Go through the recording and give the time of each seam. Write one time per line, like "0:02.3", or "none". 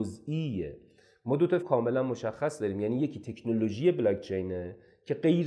0:01.6

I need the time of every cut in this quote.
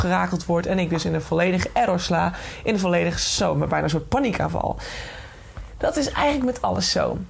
none

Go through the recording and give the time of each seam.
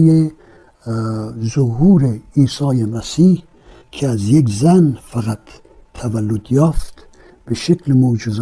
none

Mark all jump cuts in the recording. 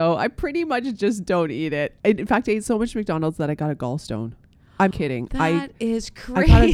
0:04.9

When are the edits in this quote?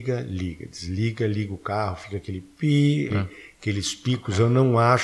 0:03.1

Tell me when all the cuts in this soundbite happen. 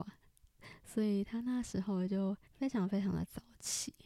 0:02.4

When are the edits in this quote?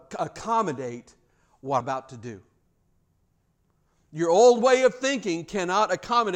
0:01.8

